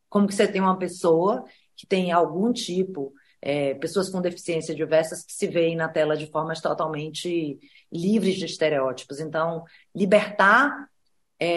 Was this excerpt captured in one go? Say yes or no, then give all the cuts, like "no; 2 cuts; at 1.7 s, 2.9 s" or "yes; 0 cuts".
yes; 0 cuts